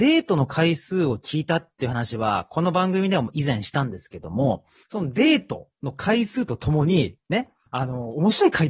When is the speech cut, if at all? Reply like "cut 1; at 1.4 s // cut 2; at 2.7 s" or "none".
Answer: none